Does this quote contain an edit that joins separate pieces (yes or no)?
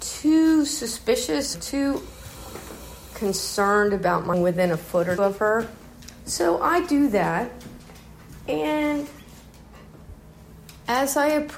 yes